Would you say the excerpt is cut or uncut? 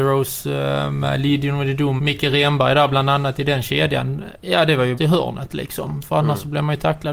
cut